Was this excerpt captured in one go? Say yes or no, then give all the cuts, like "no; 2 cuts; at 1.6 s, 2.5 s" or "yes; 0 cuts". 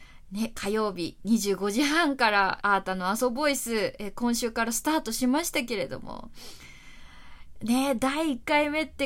no; 1 cut; at 2.6 s